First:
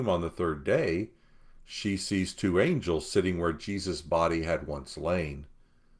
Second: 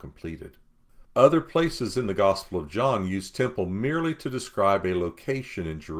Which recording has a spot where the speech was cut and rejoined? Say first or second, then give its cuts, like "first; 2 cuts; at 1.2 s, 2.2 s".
second; 1 cut; at 1.0 s